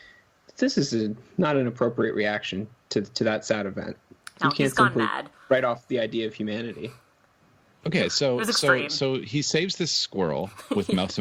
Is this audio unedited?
yes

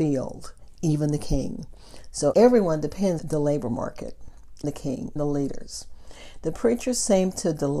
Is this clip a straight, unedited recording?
no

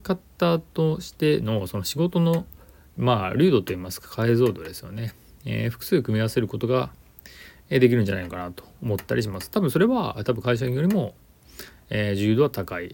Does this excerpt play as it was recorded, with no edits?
yes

